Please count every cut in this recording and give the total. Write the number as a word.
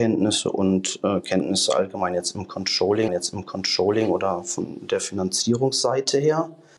one